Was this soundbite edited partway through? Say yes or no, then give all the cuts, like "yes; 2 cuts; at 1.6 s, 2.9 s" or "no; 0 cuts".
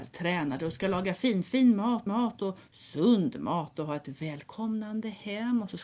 yes; 1 cut; at 2.1 s